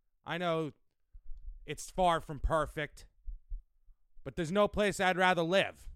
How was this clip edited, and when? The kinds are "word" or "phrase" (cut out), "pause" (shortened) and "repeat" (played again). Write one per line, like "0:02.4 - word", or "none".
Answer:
none